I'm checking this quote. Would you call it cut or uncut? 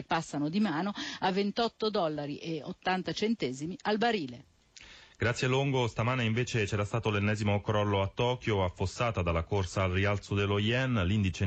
uncut